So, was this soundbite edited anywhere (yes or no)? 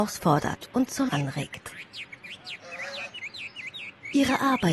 yes